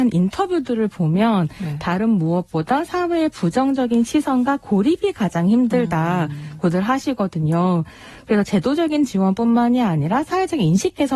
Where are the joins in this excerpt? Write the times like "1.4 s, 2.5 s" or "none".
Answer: none